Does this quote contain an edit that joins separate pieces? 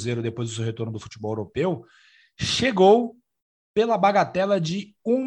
no; 0 cuts

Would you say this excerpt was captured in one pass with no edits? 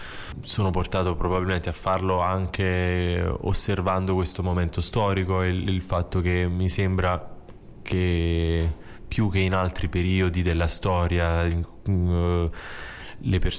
yes; 0 cuts

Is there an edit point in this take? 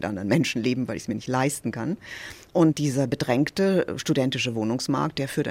no; 0 cuts

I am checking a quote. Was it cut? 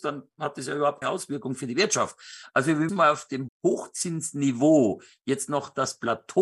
yes; 2 cuts; at 1.0 s, 2.9 s

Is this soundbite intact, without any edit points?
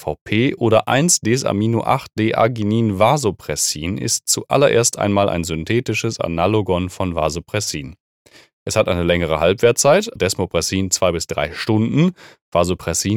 no; 1 cut; at 10.2 s

